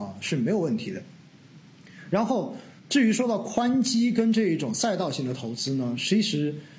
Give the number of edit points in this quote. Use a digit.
1